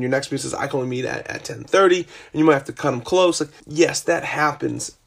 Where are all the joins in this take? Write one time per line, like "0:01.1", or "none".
0:03.6